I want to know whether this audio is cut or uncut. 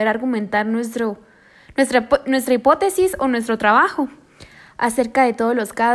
uncut